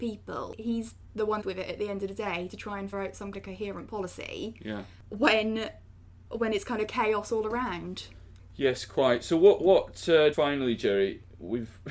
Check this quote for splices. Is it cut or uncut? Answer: cut